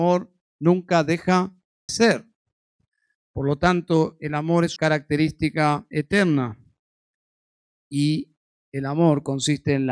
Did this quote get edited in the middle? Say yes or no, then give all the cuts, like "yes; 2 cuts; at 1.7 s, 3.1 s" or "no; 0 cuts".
yes; 2 cuts; at 1.9 s, 4.8 s